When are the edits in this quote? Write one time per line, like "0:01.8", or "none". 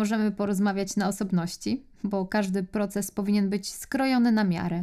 none